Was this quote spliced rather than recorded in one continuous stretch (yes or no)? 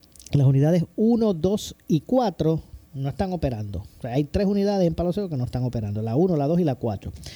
yes